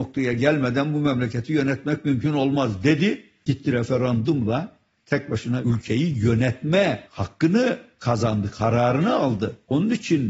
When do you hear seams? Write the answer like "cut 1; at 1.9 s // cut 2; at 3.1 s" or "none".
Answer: none

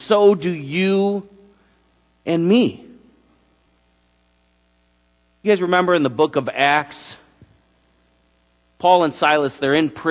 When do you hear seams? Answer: none

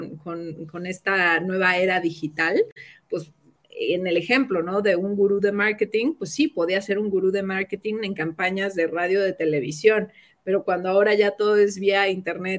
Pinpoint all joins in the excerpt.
none

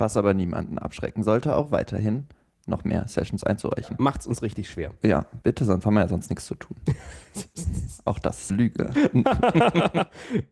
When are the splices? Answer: cut 1; at 5.4 s // cut 2; at 8.5 s

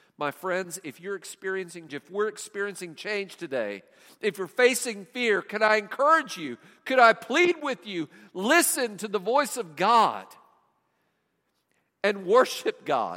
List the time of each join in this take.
cut 1; at 1.9 s

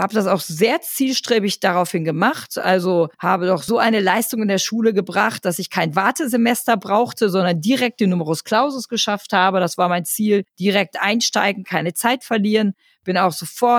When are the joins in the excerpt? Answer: cut 1; at 3.1 s // cut 2; at 10.5 s

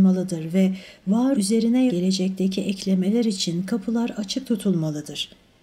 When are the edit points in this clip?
cut 1; at 1.3 s // cut 2; at 1.9 s

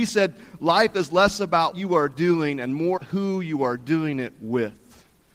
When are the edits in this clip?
cut 1; at 1.7 s // cut 2; at 3.0 s

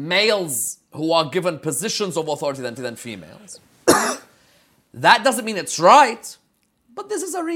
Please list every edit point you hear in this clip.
cut 1; at 2.8 s

